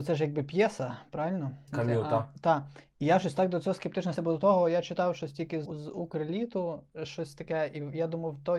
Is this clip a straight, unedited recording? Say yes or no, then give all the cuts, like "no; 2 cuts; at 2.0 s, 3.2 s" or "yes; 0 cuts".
no; 3 cuts; at 4.2 s, 5.7 s, 6.9 s